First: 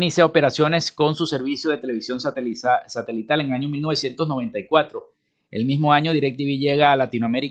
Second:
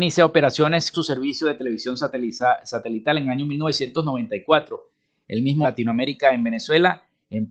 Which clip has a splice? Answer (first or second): second